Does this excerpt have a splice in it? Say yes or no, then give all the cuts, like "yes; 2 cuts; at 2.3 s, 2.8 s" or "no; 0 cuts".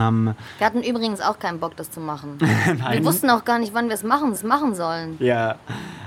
yes; 1 cut; at 4.4 s